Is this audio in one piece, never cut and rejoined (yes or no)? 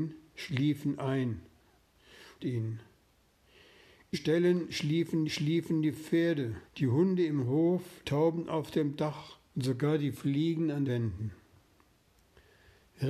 no